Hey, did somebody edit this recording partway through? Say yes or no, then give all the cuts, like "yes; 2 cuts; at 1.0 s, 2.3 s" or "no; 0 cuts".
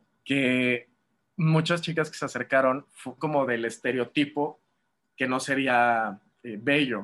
yes; 1 cut; at 3.2 s